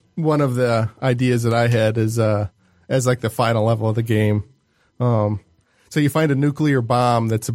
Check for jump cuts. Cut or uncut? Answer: uncut